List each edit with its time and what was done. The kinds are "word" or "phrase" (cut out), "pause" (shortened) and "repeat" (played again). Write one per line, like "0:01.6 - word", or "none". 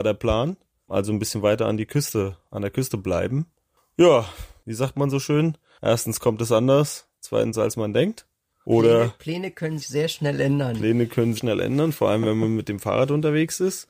0:09.8 - word
0:11.4 - phrase

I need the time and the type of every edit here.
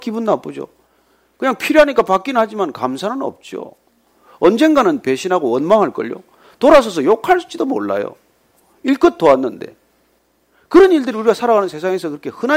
none

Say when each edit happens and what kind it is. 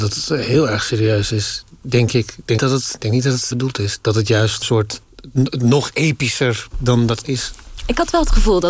0:02.6 - word
0:03.0 - word
0:03.5 - word
0:04.6 - word
0:06.7 - word
0:07.2 - word

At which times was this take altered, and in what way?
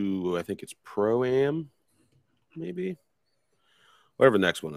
none

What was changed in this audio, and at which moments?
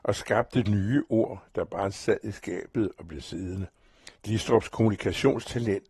0:04.1 - pause

